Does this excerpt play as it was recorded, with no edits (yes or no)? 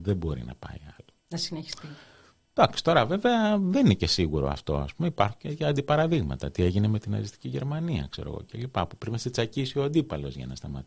yes